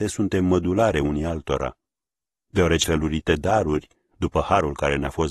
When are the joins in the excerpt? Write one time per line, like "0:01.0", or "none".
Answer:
0:02.8